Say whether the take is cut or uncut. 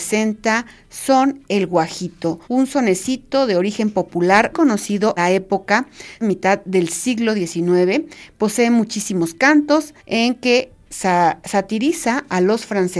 cut